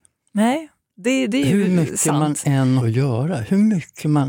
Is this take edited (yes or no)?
yes